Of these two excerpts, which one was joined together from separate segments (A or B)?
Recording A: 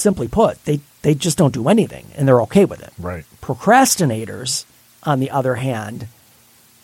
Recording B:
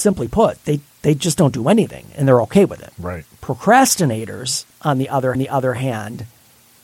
B